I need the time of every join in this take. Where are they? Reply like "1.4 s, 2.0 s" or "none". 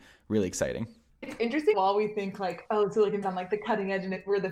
1.1 s, 1.7 s, 3.2 s